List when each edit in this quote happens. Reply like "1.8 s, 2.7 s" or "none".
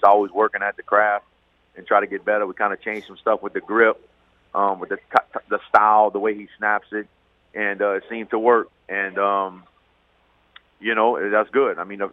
none